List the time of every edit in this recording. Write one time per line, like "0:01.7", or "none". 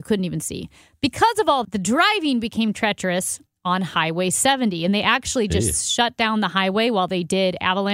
0:01.6
0:03.5